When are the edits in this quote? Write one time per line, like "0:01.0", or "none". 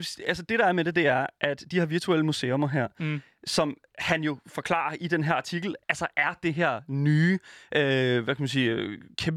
0:05.8